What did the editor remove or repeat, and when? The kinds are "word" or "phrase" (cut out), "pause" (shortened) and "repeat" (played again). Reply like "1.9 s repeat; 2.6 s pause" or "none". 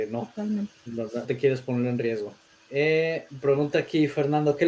1.2 s word; 2.5 s pause

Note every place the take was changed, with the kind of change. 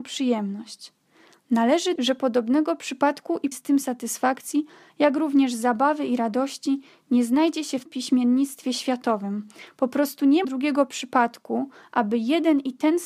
1.9 s word; 3.5 s word; 7.9 s word; 10.4 s word

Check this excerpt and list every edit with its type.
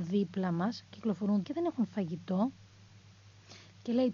1.4 s phrase

